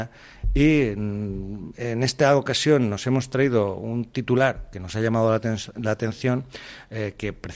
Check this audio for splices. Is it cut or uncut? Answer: uncut